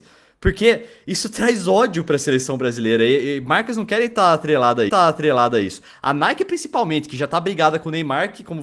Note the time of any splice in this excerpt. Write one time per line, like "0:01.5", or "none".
0:04.9